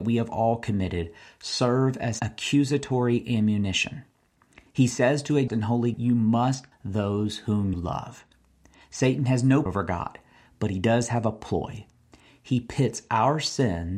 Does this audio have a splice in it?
yes; 6 cuts; at 2.2 s, 5.5 s, 5.9 s, 6.7 s, 7.7 s, 9.7 s

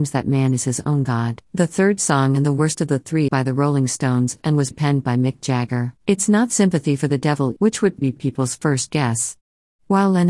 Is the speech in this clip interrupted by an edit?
yes; 6 cuts; at 1.5 s, 3.3 s, 4.7 s, 6.0 s, 7.6 s, 8.0 s

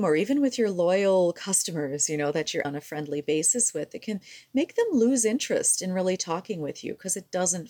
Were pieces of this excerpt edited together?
yes; 1 cut; at 2.6 s

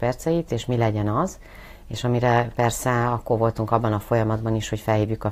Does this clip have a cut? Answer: yes; 1 cut; at 2.5 s

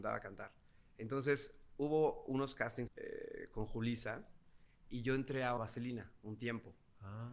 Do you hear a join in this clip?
yes; 2 cuts; at 2.9 s, 5.6 s

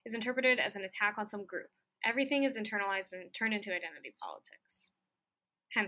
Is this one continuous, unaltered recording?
yes; 0 cuts

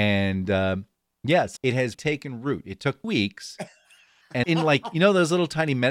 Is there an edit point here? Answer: yes; 4 cuts; at 1.6 s, 1.9 s, 3.0 s, 4.4 s

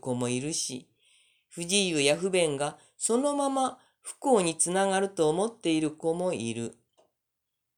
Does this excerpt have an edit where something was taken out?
no; 0 cuts

